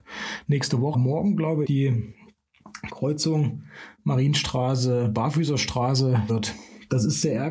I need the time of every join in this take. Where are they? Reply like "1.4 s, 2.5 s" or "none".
0.9 s, 1.6 s, 6.3 s